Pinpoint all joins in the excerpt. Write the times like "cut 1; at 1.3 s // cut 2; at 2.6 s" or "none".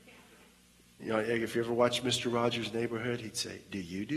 none